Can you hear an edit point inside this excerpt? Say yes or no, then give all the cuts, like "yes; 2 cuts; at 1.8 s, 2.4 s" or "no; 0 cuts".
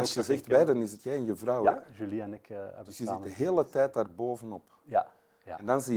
no; 0 cuts